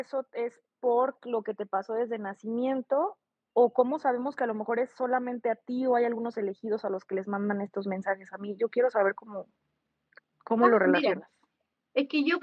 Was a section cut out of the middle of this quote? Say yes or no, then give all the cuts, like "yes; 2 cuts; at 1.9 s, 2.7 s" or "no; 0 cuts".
no; 0 cuts